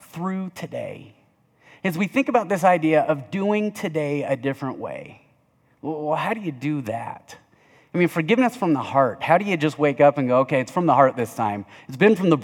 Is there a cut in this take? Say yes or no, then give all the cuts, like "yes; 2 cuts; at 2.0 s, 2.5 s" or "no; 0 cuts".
no; 0 cuts